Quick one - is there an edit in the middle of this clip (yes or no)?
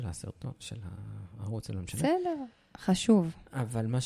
no